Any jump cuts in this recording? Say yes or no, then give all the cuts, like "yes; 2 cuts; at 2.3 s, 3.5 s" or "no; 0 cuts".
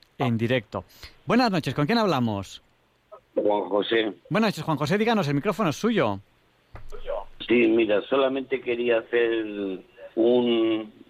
yes; 2 cuts; at 4.2 s, 10.1 s